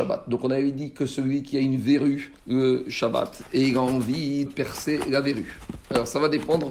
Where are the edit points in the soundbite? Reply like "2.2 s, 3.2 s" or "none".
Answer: 2.4 s, 4.5 s